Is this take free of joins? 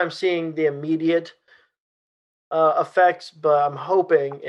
yes; 0 cuts

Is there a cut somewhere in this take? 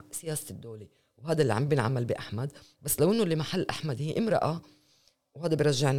no; 0 cuts

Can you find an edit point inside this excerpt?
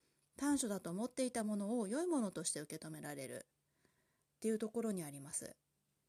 no; 0 cuts

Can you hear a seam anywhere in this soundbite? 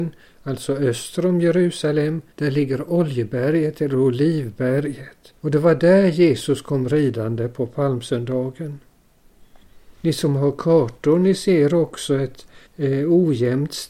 yes; 4 cuts; at 2.3 s, 5.4 s, 10.0 s, 12.7 s

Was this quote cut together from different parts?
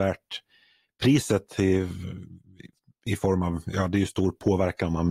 no; 0 cuts

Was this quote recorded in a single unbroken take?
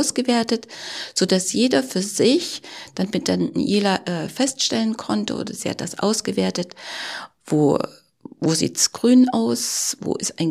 yes; 0 cuts

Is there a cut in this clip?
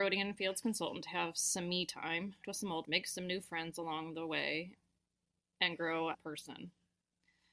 yes; 3 cuts; at 2.4 s, 2.8 s, 6.1 s

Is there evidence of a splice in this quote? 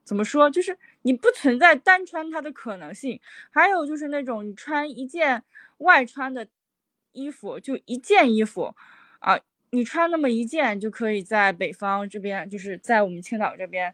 no; 0 cuts

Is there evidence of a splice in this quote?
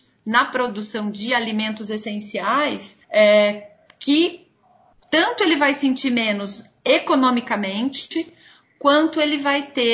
yes; 1 cut; at 3.0 s

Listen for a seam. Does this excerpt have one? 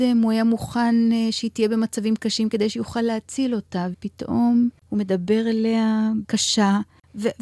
yes; 3 cuts; at 3.9 s, 4.8 s, 6.2 s

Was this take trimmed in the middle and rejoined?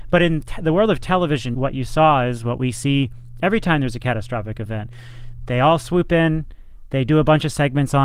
yes; 1 cut; at 1.5 s

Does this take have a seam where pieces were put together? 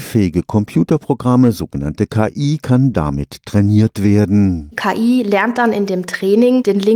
no; 0 cuts

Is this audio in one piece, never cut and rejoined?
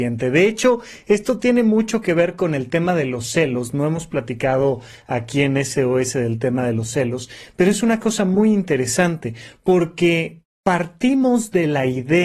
yes; 0 cuts

